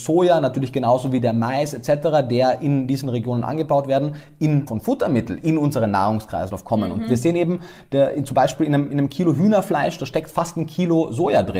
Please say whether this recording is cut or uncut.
cut